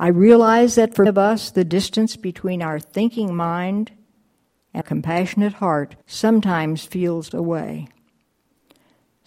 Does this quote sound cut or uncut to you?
cut